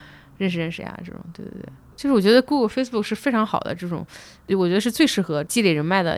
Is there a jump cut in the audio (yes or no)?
no